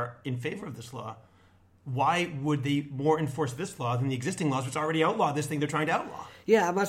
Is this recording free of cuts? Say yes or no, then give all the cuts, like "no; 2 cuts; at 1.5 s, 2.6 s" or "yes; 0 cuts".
yes; 0 cuts